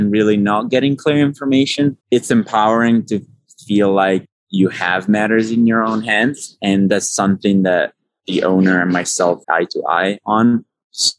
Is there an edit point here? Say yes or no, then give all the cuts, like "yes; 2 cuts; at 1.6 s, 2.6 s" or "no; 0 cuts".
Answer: yes; 2 cuts; at 2.0 s, 9.4 s